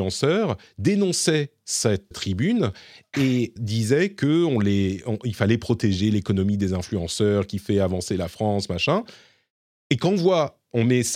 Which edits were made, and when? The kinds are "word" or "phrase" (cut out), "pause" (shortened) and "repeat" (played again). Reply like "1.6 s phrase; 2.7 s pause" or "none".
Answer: 2.1 s word; 3.6 s word